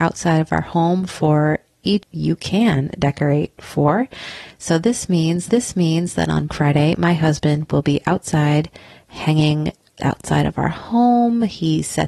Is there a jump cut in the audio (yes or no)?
yes